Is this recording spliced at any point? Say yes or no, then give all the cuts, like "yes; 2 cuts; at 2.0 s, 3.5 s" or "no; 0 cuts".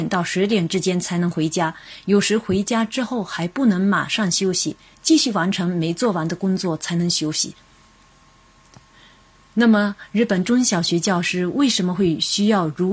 no; 0 cuts